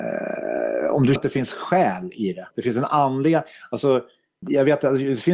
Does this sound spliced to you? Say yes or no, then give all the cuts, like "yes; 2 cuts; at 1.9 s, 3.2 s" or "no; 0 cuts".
yes; 3 cuts; at 1.2 s, 2.5 s, 4.4 s